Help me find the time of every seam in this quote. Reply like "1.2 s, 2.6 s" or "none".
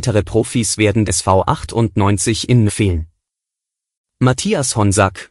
1.1 s, 2.7 s